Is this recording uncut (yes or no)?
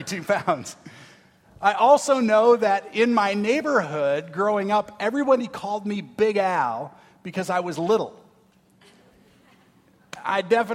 yes